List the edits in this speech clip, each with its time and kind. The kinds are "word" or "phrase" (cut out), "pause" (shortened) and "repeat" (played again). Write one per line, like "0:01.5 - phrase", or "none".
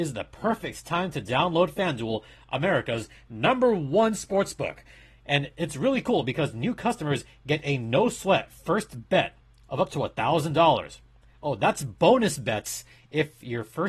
none